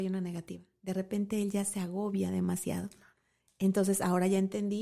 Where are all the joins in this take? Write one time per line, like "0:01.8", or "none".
none